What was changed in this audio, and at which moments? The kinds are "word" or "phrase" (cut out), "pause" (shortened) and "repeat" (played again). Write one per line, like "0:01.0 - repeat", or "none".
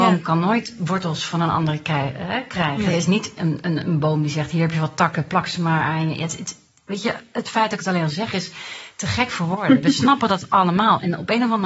none